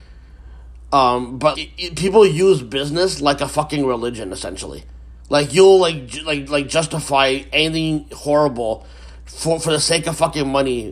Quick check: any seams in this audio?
yes; 1 cut; at 1.5 s

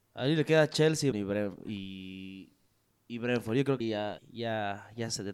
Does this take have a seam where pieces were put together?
yes; 3 cuts; at 1.1 s, 3.8 s, 4.2 s

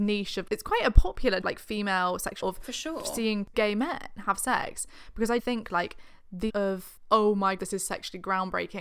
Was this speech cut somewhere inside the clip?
yes; 6 cuts; at 1.4 s, 2.4 s, 3.5 s, 5.4 s, 6.5 s, 7.6 s

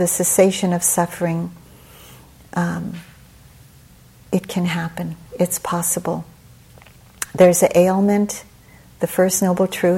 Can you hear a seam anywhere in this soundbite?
no; 0 cuts

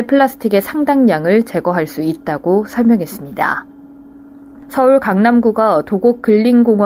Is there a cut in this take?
no; 0 cuts

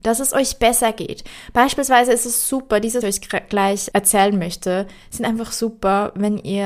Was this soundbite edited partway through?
yes; 2 cuts; at 3.0 s, 3.9 s

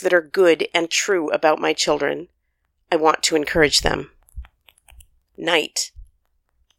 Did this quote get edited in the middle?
no; 0 cuts

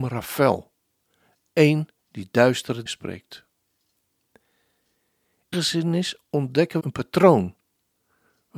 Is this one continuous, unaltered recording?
no; 4 cuts; at 2.0 s, 2.9 s, 5.5 s, 6.8 s

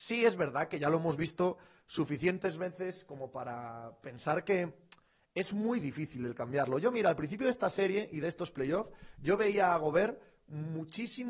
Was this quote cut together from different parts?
no; 0 cuts

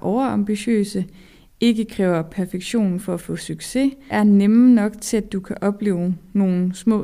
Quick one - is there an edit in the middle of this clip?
yes; 1 cut; at 4.1 s

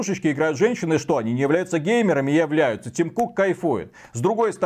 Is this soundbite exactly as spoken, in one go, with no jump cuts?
yes; 0 cuts

